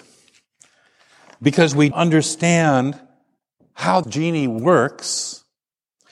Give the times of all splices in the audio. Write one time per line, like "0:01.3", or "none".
0:01.9
0:04.0